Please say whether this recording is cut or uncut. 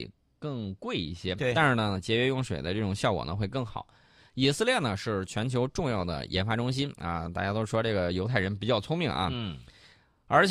uncut